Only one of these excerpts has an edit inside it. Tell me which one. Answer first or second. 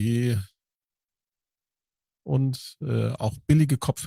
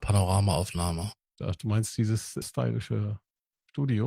second